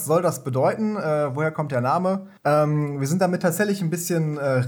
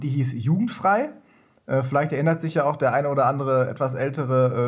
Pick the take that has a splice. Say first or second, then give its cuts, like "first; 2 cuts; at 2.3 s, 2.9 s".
first; 1 cut; at 2.4 s